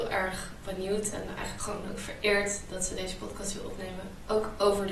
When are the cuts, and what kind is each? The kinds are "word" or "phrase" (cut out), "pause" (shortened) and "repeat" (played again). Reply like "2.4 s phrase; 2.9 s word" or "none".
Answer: none